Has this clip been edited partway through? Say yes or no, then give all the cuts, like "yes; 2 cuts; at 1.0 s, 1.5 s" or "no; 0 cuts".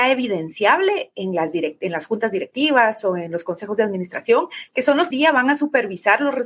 yes; 1 cut; at 5.1 s